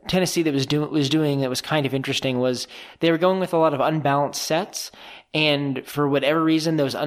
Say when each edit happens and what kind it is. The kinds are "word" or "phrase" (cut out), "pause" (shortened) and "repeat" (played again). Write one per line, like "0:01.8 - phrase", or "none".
none